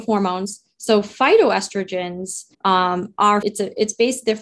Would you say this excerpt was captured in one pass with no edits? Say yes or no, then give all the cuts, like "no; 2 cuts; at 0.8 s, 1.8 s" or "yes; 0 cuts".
no; 2 cuts; at 2.5 s, 3.4 s